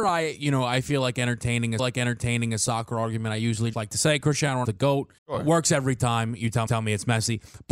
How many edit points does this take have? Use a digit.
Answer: 5